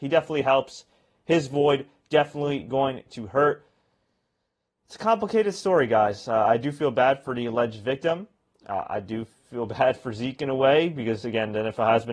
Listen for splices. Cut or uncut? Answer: uncut